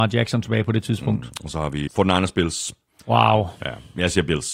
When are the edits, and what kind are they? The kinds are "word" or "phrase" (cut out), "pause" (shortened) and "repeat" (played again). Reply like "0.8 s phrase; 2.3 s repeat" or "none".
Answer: 1.9 s word